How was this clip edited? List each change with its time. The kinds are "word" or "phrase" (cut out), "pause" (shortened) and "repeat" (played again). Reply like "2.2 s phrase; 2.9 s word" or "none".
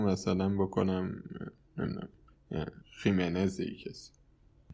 2.8 s pause